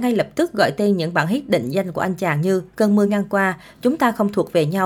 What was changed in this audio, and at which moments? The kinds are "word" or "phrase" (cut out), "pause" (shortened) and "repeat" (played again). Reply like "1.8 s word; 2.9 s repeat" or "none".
none